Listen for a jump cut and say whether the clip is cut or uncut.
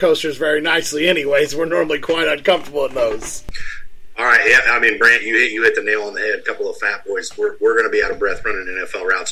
uncut